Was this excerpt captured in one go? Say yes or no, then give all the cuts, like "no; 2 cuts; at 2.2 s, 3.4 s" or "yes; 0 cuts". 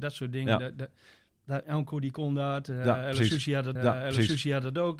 no; 1 cut; at 3.8 s